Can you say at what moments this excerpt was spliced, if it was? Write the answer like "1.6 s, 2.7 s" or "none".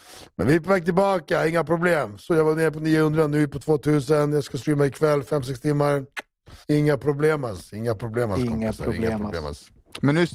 6.6 s